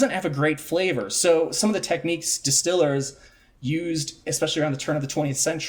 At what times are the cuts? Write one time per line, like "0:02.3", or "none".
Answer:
none